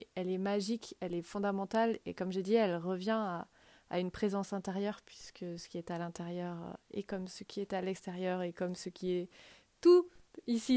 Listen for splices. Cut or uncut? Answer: uncut